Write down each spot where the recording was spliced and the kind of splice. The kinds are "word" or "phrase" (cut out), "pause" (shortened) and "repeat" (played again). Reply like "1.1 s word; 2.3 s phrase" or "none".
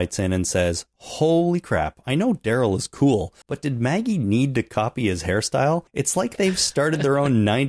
3.4 s pause; 5.9 s pause